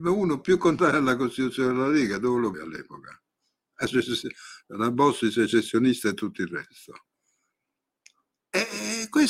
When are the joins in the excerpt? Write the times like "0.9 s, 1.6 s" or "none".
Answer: 2.5 s